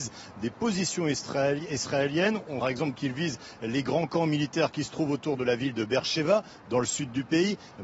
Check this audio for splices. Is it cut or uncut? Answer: cut